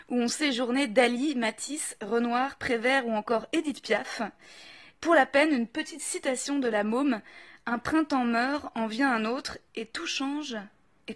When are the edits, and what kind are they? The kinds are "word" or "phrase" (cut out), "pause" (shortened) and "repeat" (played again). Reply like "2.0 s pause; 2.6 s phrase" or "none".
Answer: none